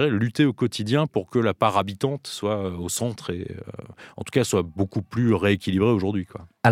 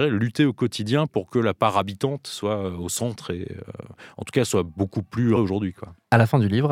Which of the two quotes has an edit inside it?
second; 1 cut; at 5.4 s

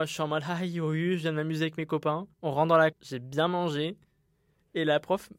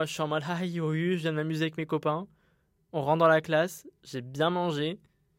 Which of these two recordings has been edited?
first; 2 cuts; at 2.3 s, 2.9 s

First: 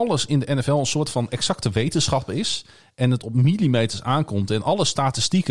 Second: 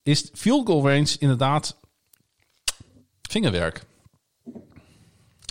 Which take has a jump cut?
second; 1 cut; at 3.3 s

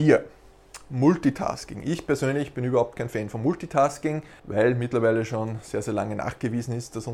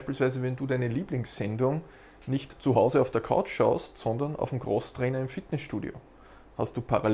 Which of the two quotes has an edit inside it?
first; 1 cut; at 4.4 s

